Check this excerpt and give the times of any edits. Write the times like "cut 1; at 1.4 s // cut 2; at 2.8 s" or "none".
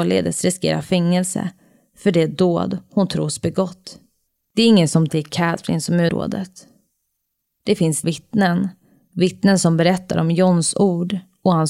cut 1; at 4.3 s // cut 2; at 5.1 s // cut 3; at 6.1 s // cut 4; at 8.0 s

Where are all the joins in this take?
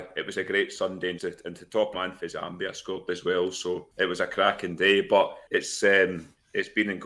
cut 1; at 1.2 s // cut 2; at 1.9 s // cut 3; at 3.9 s // cut 4; at 5.5 s

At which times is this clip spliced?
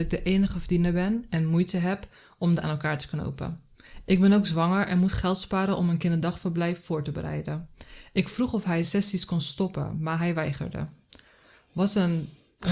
cut 1; at 2.6 s // cut 2; at 8.8 s

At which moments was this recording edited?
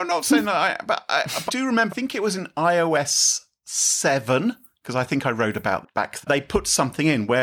cut 1; at 1.5 s // cut 2; at 1.9 s // cut 3; at 5.8 s // cut 4; at 6.2 s

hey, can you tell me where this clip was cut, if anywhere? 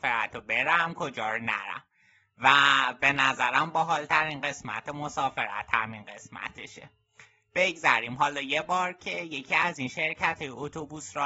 none

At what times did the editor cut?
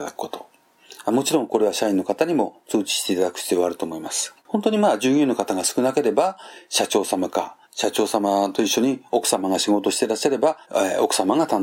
cut 1; at 4.4 s // cut 2; at 7.6 s // cut 3; at 10.6 s

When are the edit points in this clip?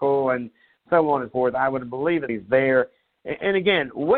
cut 1; at 1.3 s // cut 2; at 2.3 s

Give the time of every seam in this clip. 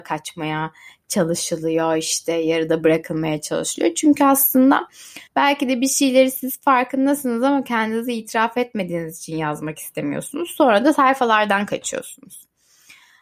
cut 1; at 5.3 s

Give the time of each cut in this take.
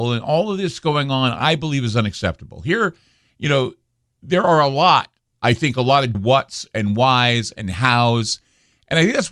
cut 1; at 5.3 s // cut 2; at 6.1 s

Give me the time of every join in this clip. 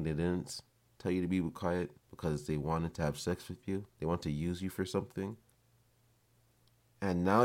cut 1; at 2.0 s // cut 2; at 3.9 s

